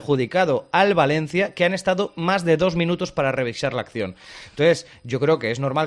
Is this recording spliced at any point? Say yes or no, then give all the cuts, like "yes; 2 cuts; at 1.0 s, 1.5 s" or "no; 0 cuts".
no; 0 cuts